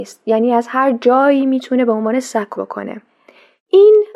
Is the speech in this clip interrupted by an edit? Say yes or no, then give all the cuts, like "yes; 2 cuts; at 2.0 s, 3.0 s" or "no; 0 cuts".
yes; 1 cut; at 2.6 s